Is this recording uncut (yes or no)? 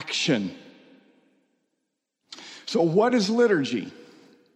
yes